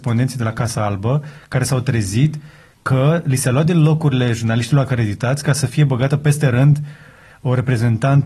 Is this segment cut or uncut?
uncut